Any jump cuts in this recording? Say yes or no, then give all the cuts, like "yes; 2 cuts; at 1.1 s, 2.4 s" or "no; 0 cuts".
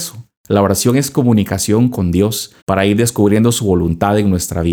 yes; 1 cut; at 2.6 s